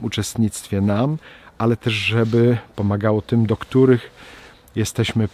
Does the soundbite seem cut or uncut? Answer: uncut